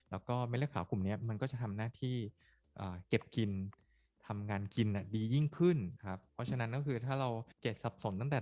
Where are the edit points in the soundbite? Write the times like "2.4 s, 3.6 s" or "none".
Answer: 6.0 s, 7.5 s